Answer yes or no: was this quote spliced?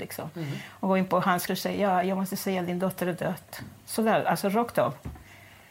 yes